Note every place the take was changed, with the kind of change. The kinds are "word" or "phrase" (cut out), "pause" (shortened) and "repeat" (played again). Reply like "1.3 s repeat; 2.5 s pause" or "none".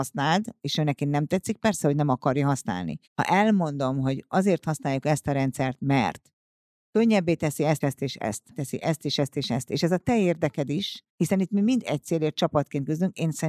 3.0 s pause; 7.8 s word; 8.5 s word; 11.1 s pause